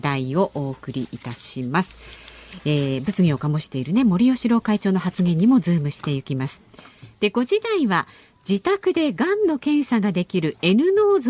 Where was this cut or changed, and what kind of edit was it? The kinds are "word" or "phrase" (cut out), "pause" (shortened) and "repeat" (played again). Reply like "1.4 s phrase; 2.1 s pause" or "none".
none